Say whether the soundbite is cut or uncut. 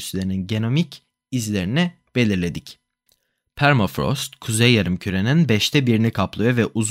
cut